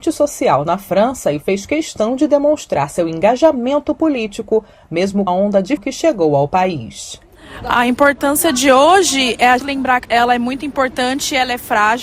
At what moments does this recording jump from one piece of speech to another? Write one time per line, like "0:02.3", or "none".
0:05.3
0:05.8
0:09.6
0:10.0